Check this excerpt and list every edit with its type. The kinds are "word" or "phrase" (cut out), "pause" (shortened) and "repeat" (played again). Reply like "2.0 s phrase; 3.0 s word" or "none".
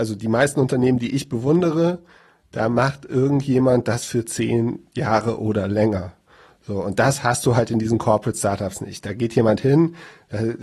none